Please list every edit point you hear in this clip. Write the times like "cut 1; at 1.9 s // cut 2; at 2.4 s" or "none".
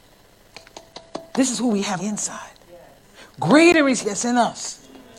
cut 1; at 2.0 s // cut 2; at 4.0 s